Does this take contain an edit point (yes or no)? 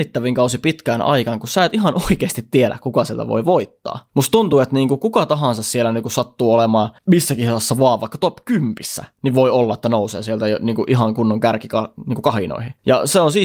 no